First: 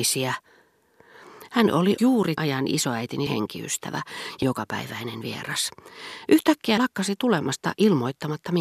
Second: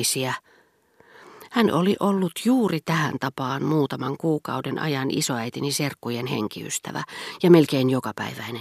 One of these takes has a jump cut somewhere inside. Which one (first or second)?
first